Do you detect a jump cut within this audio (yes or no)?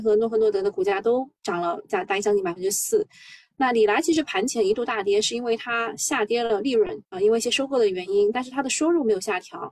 yes